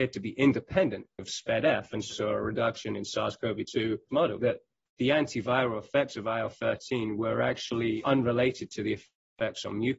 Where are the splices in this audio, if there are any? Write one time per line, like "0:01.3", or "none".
0:01.2
0:02.1
0:04.1
0:04.4